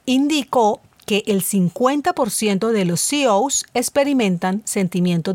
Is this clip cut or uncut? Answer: uncut